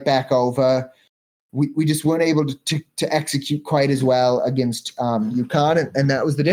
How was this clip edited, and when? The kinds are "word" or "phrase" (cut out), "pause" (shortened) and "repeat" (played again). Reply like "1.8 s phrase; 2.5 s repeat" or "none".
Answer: none